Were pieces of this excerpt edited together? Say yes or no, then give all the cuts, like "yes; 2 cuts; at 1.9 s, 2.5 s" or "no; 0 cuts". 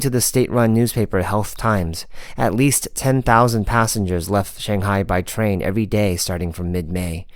no; 0 cuts